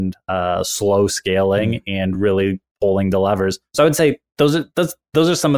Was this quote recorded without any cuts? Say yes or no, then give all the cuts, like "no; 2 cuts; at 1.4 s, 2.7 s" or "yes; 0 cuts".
yes; 0 cuts